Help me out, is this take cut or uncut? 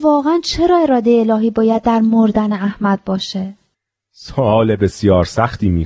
uncut